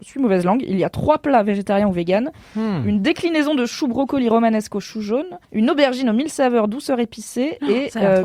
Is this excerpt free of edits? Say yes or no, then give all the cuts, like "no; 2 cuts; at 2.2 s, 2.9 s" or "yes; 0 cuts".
no; 1 cut; at 5.4 s